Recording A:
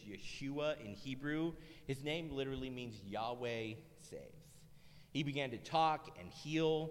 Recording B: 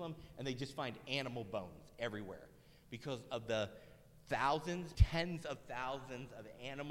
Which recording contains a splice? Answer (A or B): B